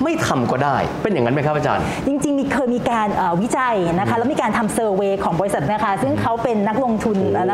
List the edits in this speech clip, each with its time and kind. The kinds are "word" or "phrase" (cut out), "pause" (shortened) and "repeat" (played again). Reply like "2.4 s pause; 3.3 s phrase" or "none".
5.7 s word